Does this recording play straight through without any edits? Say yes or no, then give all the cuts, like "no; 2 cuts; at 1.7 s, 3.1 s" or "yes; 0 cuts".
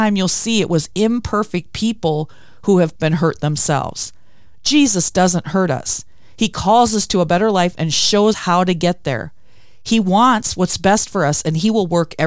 no; 2 cuts; at 3.0 s, 8.3 s